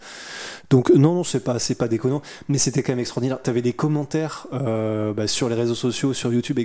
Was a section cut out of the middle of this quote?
no; 0 cuts

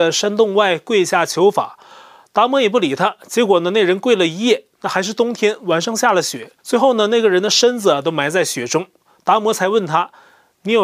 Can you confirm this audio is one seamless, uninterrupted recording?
no; 1 cut; at 6.6 s

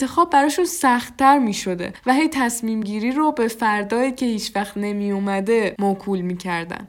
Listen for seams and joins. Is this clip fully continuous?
yes; 0 cuts

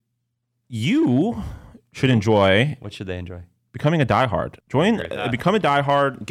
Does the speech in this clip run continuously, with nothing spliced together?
no; 1 cut; at 4.6 s

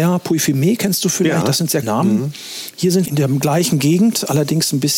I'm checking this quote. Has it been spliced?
yes; 2 cuts; at 1.8 s, 3.1 s

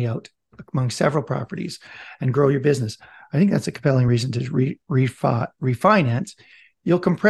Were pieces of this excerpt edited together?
no; 0 cuts

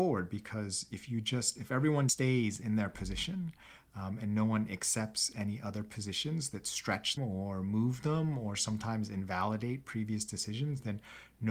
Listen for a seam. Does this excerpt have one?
yes; 2 cuts; at 2.1 s, 7.2 s

